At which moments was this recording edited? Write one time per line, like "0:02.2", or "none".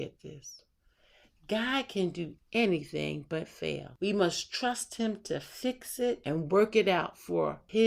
none